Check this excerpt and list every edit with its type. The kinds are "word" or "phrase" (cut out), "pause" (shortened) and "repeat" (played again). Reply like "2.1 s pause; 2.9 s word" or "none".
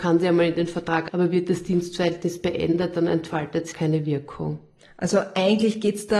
1.1 s word; 3.7 s word